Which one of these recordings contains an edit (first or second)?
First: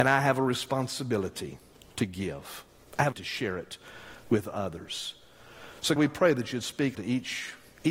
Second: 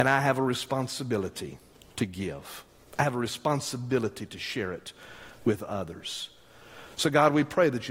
first